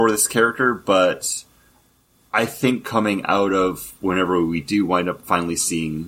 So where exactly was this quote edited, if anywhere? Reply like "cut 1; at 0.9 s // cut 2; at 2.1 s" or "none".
none

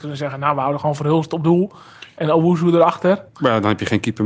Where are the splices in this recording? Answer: cut 1; at 3.3 s

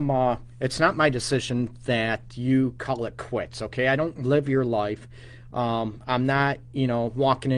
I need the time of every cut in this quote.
none

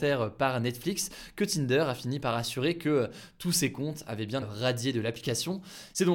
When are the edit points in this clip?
cut 1; at 4.4 s

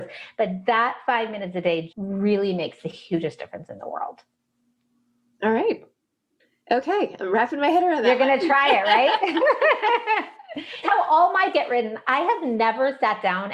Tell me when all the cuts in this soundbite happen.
cut 1; at 1.9 s // cut 2; at 10.8 s // cut 3; at 11.5 s

